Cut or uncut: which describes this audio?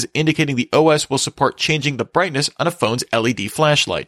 uncut